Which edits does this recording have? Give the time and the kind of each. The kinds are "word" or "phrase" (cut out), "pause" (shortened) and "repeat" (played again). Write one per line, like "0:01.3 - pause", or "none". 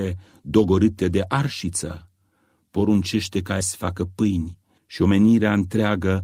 0:03.6 - word